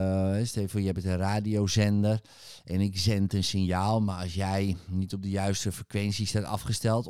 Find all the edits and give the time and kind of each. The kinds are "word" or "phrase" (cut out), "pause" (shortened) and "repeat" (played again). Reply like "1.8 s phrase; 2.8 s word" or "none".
none